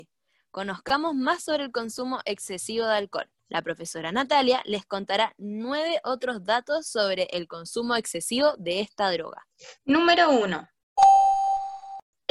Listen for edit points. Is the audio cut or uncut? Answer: cut